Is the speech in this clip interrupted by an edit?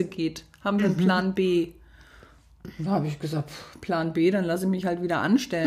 no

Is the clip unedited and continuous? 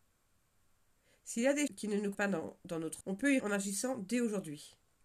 no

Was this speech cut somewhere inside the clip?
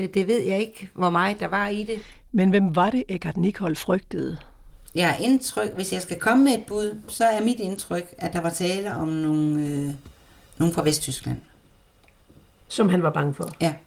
no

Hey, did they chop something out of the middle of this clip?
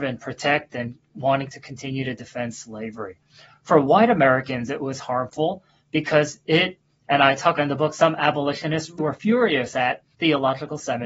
yes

